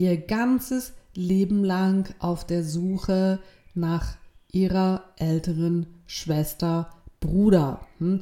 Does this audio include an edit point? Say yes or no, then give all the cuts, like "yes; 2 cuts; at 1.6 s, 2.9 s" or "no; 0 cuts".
no; 0 cuts